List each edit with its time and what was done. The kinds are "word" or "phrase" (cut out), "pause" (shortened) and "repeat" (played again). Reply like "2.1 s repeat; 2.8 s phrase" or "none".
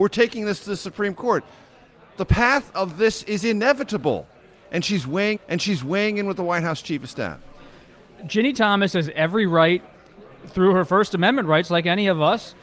5.4 s repeat